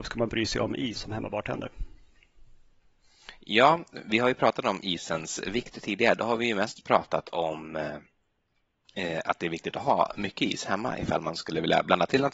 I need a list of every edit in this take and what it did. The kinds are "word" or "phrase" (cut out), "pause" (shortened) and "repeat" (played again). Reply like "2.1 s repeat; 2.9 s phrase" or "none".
1.0 s word